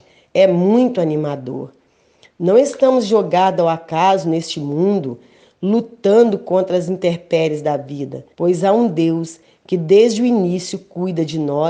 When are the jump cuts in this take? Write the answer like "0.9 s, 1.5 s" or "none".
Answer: 8.3 s